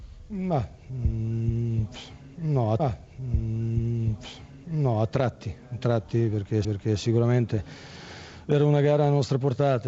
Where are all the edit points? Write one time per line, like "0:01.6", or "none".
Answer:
0:02.8
0:06.6